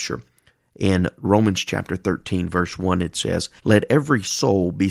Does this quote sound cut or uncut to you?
cut